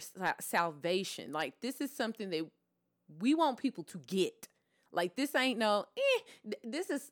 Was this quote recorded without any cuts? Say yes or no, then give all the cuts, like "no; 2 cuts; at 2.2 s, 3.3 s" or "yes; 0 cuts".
yes; 0 cuts